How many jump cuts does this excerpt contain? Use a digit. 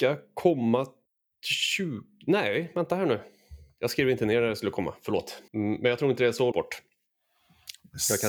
3